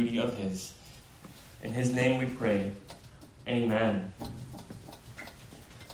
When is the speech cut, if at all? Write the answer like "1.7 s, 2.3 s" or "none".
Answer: none